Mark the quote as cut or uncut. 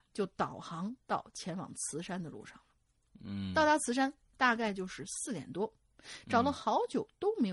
uncut